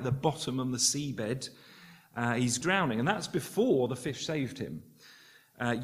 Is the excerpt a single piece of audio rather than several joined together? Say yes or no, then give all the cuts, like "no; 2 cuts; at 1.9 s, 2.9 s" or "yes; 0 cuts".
no; 1 cut; at 2.6 s